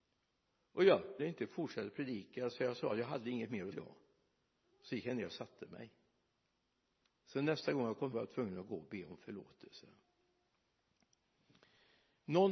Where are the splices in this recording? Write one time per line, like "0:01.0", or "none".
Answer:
0:01.2
0:03.7
0:08.1